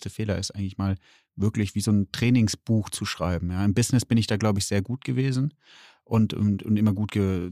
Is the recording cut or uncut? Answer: uncut